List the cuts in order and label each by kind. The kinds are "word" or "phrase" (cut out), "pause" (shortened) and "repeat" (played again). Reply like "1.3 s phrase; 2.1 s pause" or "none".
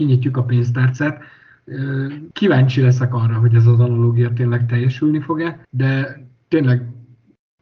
2.3 s pause; 5.6 s pause